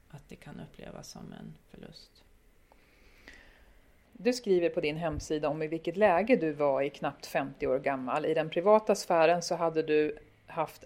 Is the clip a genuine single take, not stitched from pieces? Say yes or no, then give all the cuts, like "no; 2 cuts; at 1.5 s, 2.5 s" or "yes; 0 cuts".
yes; 0 cuts